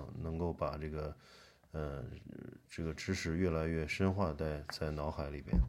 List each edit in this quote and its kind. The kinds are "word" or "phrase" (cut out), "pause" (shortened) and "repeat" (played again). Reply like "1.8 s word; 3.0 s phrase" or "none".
none

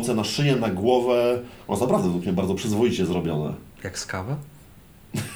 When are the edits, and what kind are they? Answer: none

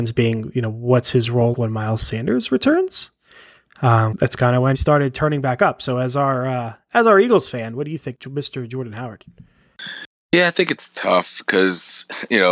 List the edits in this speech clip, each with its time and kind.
1.5 s word; 4.1 s phrase; 4.7 s phrase; 8.1 s word

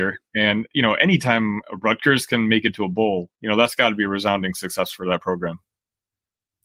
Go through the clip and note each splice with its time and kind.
3.3 s pause

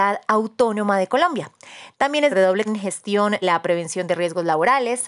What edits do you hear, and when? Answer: 2.3 s word; 2.7 s word; 3.4 s word

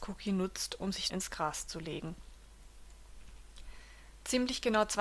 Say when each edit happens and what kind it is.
1.1 s word

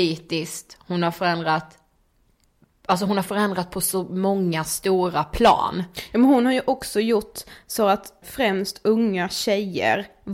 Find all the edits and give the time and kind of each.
8.2 s word

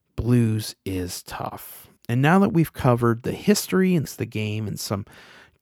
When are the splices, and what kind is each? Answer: 2.0 s pause; 4.1 s phrase

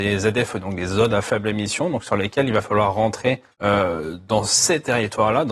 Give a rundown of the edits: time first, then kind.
3.5 s pause

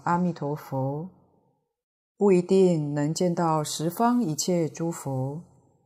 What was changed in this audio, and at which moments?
none

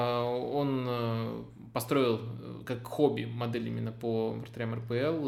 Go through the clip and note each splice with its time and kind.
none

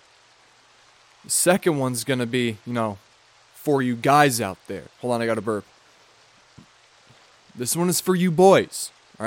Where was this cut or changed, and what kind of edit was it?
none

